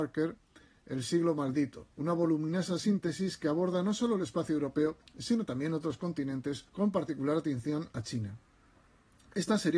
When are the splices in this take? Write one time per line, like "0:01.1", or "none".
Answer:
0:01.9
0:05.1
0:06.7